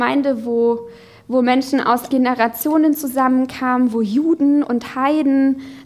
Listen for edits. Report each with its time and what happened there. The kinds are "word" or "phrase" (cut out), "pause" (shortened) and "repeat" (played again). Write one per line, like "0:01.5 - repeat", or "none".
0:02.1 - word